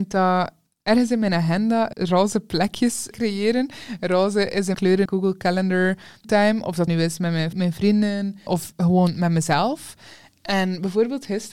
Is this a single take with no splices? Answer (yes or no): no